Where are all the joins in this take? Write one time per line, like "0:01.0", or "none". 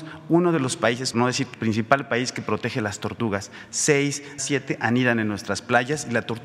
0:01.1
0:01.5
0:04.4